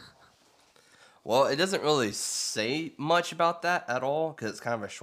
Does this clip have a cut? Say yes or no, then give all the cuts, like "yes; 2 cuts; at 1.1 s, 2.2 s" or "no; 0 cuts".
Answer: no; 0 cuts